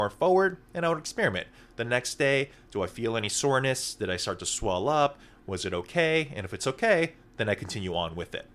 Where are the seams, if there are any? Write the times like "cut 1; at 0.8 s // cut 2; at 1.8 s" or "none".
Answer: none